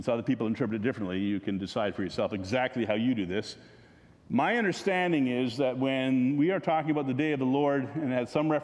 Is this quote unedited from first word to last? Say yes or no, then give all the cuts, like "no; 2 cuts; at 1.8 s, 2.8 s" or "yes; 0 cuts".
yes; 0 cuts